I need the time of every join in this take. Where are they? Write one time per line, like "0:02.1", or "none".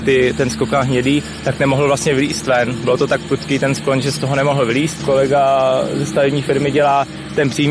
none